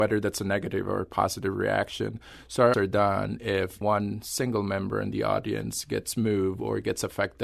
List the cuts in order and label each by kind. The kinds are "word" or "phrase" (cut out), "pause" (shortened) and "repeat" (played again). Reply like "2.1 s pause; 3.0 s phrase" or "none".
2.7 s phrase; 3.8 s word